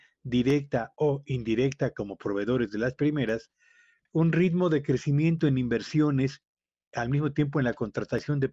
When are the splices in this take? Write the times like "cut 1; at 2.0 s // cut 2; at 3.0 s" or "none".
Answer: cut 1; at 4.1 s